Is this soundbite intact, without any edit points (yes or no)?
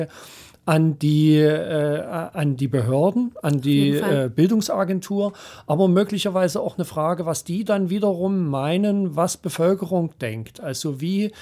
yes